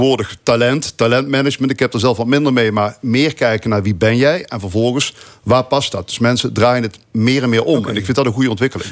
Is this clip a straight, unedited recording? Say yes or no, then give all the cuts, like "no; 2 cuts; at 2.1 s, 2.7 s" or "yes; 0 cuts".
yes; 0 cuts